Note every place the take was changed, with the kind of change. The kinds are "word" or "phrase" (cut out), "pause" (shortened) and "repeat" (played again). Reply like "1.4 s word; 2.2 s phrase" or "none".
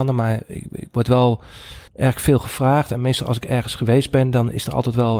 1.9 s pause